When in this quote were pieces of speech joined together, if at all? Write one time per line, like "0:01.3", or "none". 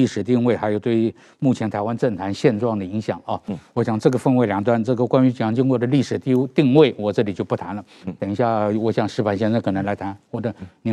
none